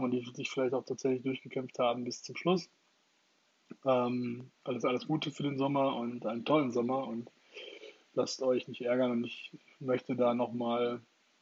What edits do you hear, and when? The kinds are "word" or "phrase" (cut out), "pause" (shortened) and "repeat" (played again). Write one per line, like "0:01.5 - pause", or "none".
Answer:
0:04.5 - pause